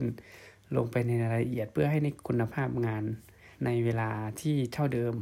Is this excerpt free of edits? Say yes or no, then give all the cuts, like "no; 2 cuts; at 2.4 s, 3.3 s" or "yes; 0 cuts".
no; 1 cut; at 3.5 s